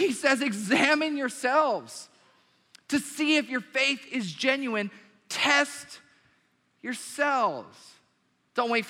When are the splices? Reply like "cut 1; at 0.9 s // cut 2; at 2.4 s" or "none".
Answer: none

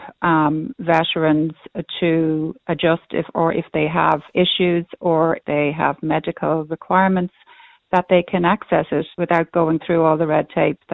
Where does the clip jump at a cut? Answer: cut 1; at 5.4 s // cut 2; at 9.1 s

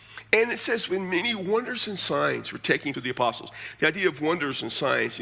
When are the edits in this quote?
cut 1; at 2.9 s

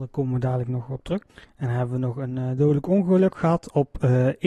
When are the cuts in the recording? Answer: cut 1; at 1.3 s

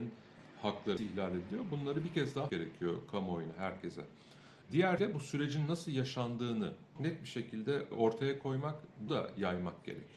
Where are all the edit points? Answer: cut 1; at 1.0 s // cut 2; at 2.5 s // cut 3; at 5.0 s // cut 4; at 7.0 s // cut 5; at 9.1 s

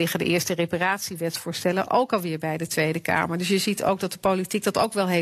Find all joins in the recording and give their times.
none

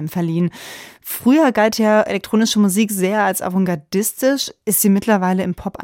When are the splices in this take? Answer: none

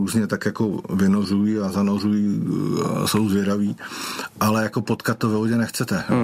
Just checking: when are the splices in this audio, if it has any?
none

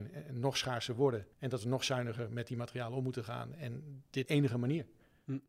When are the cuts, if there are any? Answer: cut 1; at 1.3 s // cut 2; at 4.2 s

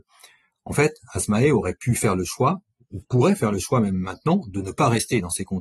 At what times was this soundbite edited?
none

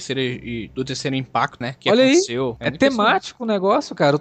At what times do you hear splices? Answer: cut 1; at 1.6 s

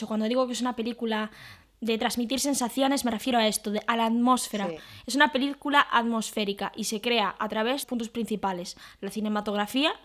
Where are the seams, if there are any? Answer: cut 1; at 7.8 s

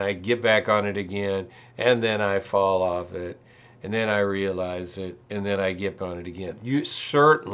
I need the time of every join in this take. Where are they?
cut 1; at 6.0 s

